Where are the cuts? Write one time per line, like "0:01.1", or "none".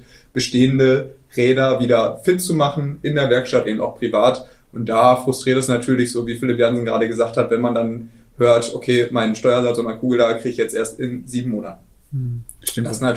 0:03.6